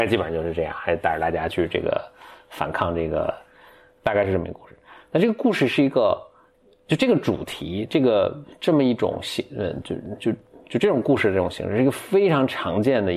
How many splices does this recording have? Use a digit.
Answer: 0